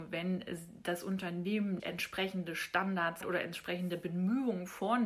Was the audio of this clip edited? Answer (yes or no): yes